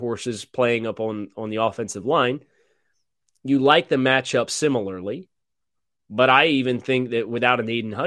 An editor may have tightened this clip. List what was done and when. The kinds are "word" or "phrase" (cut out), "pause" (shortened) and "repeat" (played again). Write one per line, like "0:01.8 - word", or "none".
none